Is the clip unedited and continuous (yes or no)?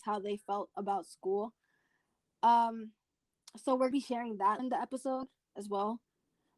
no